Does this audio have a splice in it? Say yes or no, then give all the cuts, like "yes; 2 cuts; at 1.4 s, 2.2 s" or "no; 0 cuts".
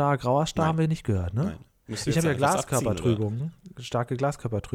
no; 0 cuts